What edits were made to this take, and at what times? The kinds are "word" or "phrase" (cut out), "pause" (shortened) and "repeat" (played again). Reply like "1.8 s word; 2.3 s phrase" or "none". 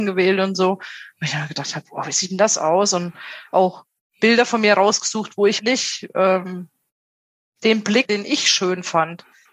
5.6 s word; 8.1 s word